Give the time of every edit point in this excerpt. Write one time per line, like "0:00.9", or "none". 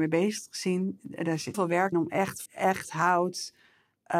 0:01.5
0:01.9
0:02.5